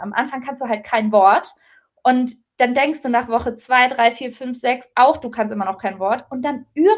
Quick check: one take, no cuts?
yes; 0 cuts

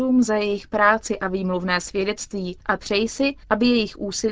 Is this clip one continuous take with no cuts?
no; 1 cut; at 2.6 s

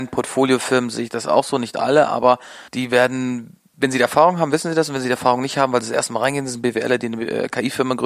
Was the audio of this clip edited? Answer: yes; 1 cut; at 2.7 s

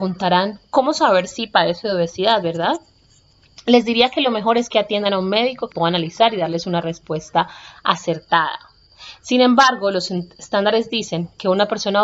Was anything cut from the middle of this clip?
yes; 1 cut; at 5.7 s

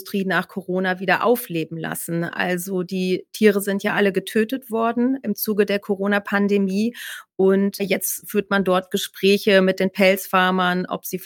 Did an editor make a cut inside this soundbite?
yes; 1 cut; at 7.8 s

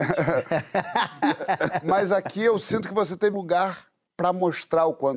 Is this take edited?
yes; 2 cuts; at 3.3 s, 4.1 s

